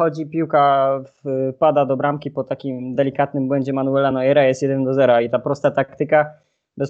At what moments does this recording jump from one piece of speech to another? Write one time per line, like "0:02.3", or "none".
none